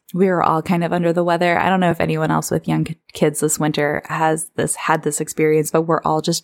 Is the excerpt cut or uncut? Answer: uncut